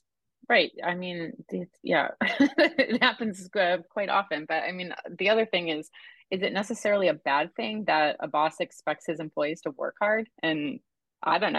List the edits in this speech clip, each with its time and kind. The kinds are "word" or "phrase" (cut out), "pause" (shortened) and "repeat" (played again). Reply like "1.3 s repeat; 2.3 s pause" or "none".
10.3 s pause